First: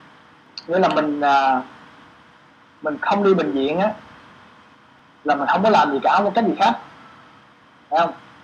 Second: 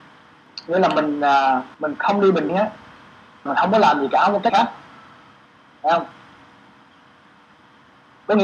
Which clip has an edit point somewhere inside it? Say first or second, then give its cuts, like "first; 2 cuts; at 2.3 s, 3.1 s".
second; 4 cuts; at 1.7 s, 2.5 s, 3.5 s, 4.5 s